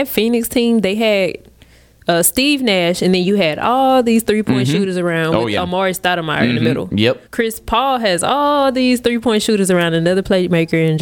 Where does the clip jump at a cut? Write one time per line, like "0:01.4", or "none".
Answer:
0:07.3

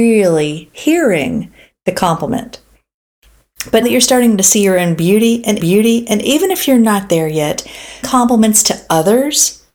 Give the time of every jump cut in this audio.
0:03.8
0:05.6
0:08.0

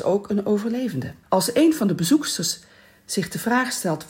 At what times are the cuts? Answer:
0:01.2

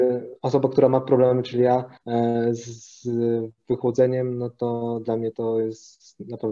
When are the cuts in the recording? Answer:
0:02.0

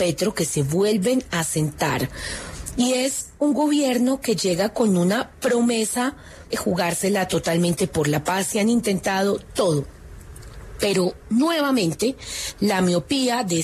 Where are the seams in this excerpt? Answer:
0:06.5

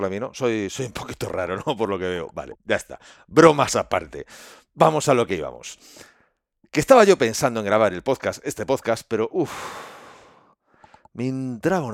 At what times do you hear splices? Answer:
0:02.6

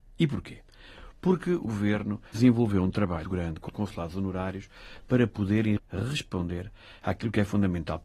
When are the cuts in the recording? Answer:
0:01.7
0:02.3
0:03.2
0:03.7
0:05.8

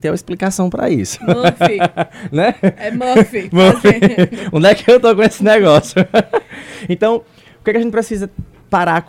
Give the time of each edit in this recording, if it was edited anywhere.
none

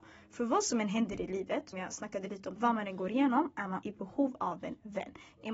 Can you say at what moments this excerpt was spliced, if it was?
0:01.7
0:02.6
0:03.8

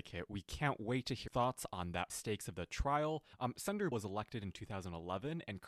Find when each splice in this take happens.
0:01.3
0:02.1
0:03.3
0:03.9

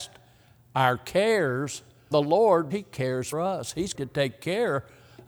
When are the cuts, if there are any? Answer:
0:02.1
0:02.7
0:03.3
0:03.9

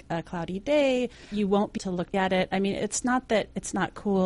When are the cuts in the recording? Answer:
0:01.8
0:02.1

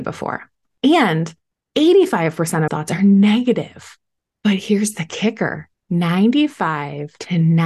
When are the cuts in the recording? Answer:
0:02.7
0:05.7

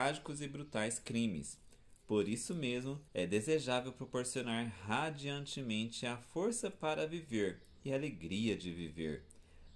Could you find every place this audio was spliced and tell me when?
0:03.1

